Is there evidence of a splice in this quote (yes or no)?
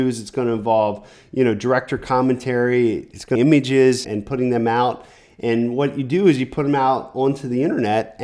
yes